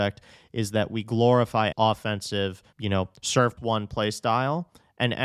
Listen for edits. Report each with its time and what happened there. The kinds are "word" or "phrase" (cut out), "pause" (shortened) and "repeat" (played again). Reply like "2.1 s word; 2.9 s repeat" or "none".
1.7 s phrase; 2.7 s pause; 3.6 s word

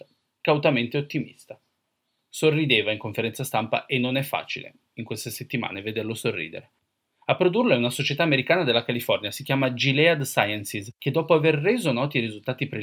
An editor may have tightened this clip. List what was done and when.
none

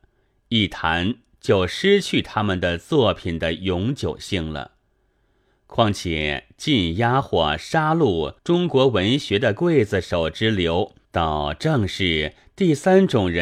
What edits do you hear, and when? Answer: 8.4 s pause; 11.0 s pause

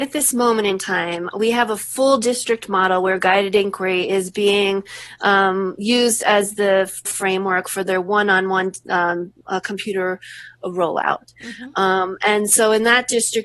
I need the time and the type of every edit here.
7.0 s word; 9.4 s pause

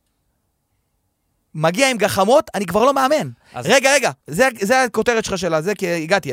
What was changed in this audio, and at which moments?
4.2 s pause

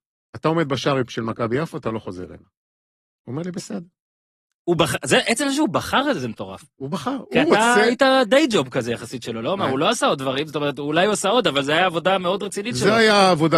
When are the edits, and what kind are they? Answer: none

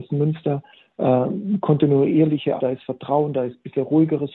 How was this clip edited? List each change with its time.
2.6 s word

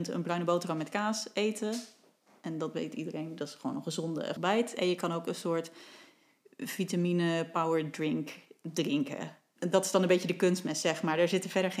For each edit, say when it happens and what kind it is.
4.4 s word

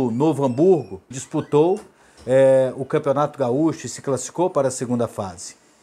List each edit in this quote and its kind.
1.1 s word

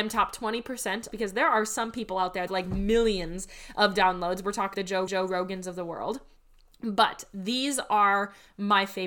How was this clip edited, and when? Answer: 1.1 s phrase; 2.5 s phrase; 4.7 s word; 5.1 s repeat

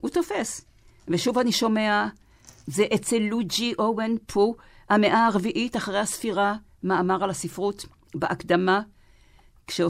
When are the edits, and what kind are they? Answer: none

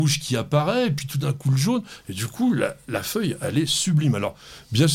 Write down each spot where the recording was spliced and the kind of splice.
none

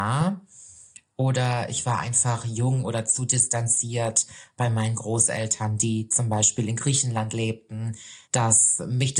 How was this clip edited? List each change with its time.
8.2 s pause

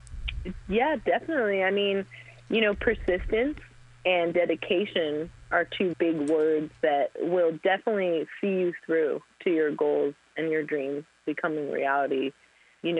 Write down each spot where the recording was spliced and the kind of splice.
3.8 s pause; 5.9 s word

